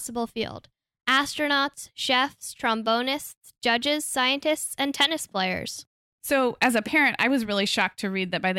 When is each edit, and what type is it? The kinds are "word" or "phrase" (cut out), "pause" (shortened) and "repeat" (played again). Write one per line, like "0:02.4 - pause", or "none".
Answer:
none